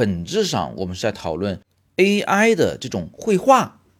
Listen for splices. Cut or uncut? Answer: uncut